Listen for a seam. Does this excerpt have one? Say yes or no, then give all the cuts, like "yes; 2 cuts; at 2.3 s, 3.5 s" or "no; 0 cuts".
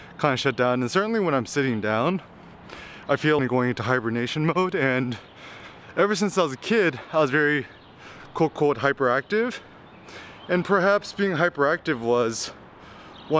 yes; 1 cut; at 3.4 s